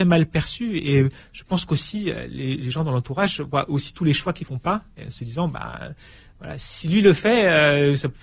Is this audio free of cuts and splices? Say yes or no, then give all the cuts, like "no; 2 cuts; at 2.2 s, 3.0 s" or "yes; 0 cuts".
no; 1 cut; at 4.4 s